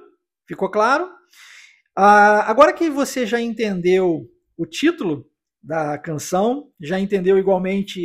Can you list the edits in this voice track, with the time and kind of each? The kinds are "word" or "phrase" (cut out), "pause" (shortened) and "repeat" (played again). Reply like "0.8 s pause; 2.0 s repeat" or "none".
none